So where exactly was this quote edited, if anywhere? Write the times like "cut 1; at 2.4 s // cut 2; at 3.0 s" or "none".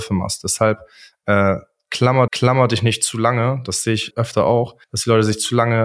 cut 1; at 2.3 s // cut 2; at 4.1 s // cut 3; at 4.8 s